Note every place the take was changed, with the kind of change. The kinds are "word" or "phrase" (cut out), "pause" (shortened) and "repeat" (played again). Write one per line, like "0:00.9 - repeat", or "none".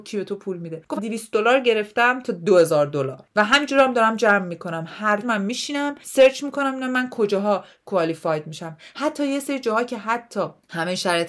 0:01.0 - word
0:05.2 - word